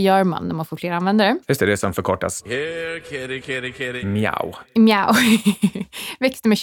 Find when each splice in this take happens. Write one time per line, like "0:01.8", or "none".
none

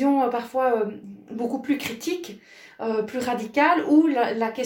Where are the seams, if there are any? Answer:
none

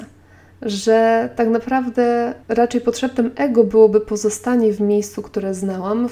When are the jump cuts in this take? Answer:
0:02.4

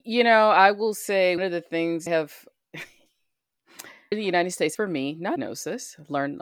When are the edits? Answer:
0:01.4
0:02.1
0:04.1
0:04.7
0:05.4

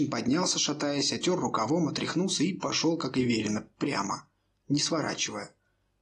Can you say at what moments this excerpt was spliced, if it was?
none

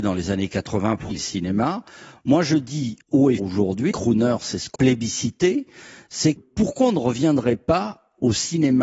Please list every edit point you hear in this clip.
0:01.1
0:03.0
0:03.4
0:03.9
0:04.8
0:06.4

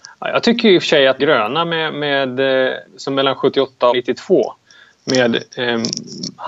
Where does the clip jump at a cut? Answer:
0:01.2
0:02.9
0:03.9

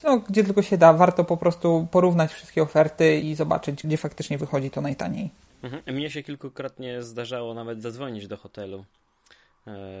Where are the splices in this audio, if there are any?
0:03.2
0:03.8
0:05.5

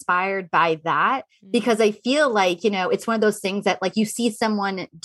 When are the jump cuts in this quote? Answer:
none

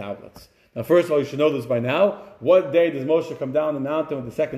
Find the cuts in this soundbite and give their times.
none

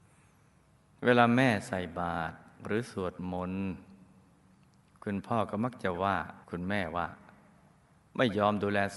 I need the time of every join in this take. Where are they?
0:06.4

